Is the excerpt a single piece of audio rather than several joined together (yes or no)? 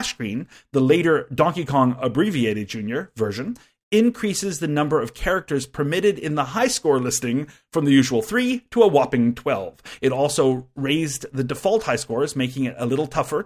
yes